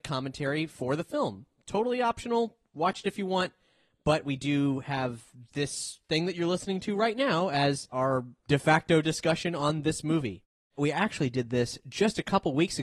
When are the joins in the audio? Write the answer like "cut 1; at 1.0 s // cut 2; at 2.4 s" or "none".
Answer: none